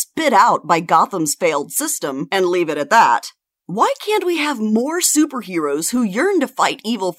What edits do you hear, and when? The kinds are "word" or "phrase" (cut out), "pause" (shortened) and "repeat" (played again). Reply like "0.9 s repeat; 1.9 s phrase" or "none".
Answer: none